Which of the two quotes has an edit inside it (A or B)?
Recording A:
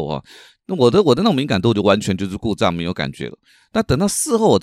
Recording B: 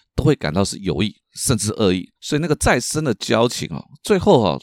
B